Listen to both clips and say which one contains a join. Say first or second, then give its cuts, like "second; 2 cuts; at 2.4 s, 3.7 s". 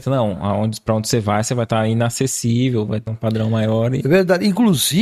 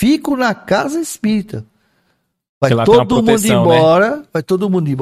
first; 1 cut; at 3.1 s